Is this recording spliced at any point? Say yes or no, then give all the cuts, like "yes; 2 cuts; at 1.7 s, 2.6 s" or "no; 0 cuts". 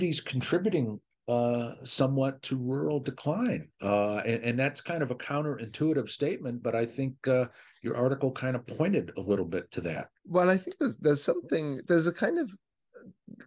yes; 1 cut; at 10.2 s